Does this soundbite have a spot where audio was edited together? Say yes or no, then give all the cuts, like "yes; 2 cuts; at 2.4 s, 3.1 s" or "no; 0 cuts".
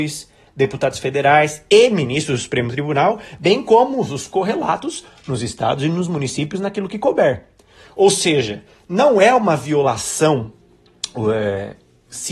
no; 0 cuts